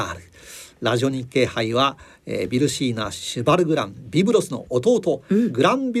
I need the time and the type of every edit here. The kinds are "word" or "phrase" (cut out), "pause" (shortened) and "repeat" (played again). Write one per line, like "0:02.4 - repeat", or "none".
none